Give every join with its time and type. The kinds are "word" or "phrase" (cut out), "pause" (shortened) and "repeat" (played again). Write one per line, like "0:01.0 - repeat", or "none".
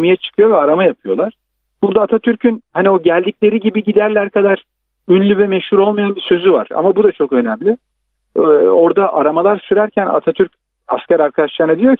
none